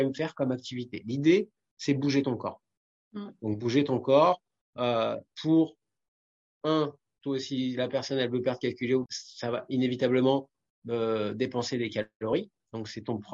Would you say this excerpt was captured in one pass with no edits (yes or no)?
no